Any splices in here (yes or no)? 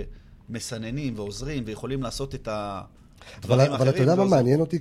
no